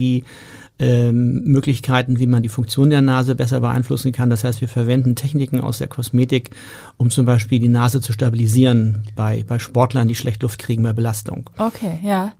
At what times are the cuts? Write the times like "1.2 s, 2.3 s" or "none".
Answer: none